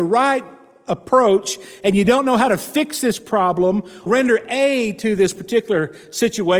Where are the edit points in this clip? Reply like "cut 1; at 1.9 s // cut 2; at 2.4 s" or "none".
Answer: cut 1; at 4.1 s